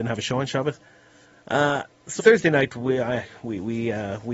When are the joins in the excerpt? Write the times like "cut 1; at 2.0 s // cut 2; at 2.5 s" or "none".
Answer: cut 1; at 2.2 s